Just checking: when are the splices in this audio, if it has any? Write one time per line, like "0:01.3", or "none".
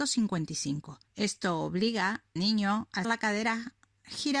0:01.1
0:02.4
0:03.0